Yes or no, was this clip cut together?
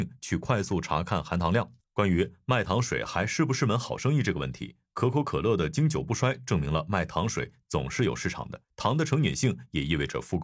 yes